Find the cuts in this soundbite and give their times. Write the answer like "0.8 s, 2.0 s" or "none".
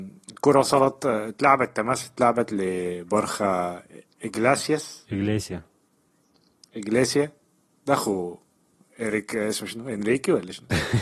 none